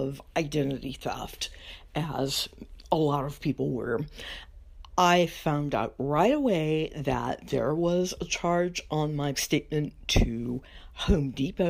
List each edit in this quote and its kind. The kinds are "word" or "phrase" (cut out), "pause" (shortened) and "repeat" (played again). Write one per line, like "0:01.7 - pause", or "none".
0:09.3 - word